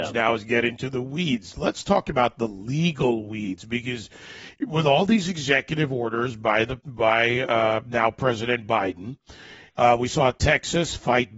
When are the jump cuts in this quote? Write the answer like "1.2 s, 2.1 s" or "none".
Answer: none